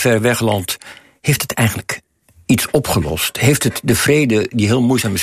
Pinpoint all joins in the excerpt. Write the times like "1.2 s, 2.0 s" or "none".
none